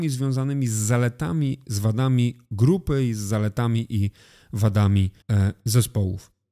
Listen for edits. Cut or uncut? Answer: cut